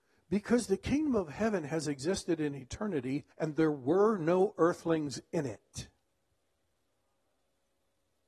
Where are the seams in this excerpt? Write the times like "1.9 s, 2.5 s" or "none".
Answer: 3.3 s